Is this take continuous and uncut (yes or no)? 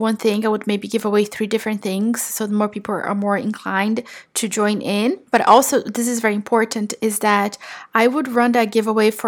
yes